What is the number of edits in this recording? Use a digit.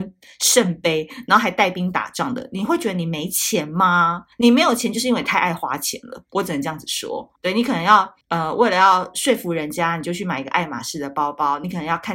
3